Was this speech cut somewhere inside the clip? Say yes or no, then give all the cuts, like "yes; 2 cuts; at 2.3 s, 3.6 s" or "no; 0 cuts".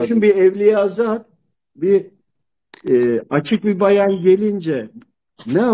no; 0 cuts